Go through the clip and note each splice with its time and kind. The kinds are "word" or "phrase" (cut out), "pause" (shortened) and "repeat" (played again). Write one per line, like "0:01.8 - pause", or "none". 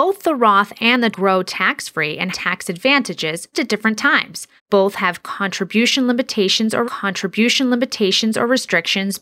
0:01.1 - phrase
0:02.3 - word
0:03.5 - word
0:04.6 - pause
0:06.8 - repeat